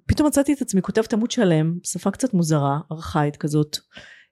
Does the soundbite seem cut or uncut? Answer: uncut